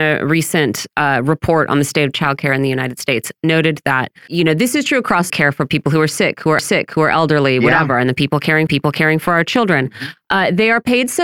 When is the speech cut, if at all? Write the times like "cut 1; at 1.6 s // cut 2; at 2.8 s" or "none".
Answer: cut 1; at 5.3 s // cut 2; at 6.6 s // cut 3; at 8.7 s